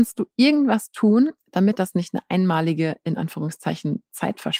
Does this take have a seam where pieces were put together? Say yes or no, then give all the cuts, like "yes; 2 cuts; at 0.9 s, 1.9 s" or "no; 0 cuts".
no; 0 cuts